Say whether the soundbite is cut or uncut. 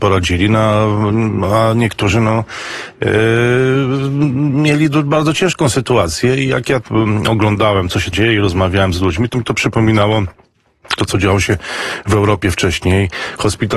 cut